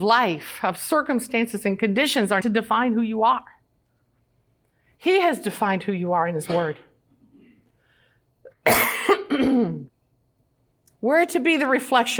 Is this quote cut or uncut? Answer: cut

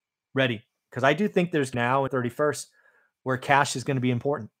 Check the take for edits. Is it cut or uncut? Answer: cut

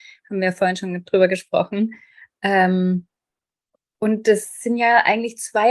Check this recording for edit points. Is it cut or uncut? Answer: uncut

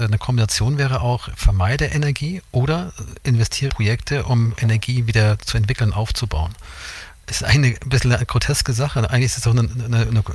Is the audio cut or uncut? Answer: cut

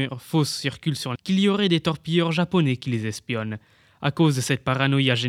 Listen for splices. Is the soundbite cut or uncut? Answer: cut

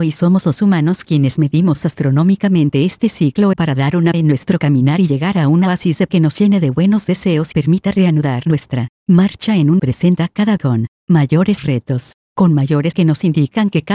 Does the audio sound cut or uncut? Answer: cut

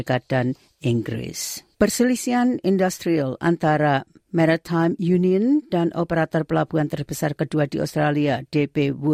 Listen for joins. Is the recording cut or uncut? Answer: cut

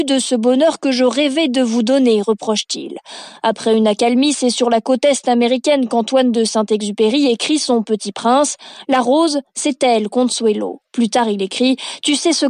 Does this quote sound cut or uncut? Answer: uncut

